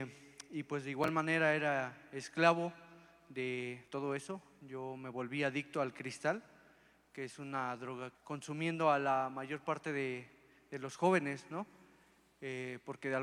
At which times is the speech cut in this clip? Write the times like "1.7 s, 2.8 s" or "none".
3.9 s, 8.1 s